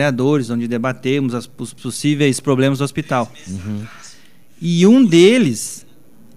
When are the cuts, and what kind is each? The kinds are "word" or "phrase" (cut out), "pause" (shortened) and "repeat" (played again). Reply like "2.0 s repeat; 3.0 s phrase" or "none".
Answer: 1.8 s word